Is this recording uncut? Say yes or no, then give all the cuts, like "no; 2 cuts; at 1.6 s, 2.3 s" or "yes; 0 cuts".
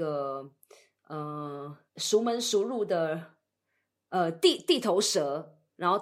no; 1 cut; at 1.9 s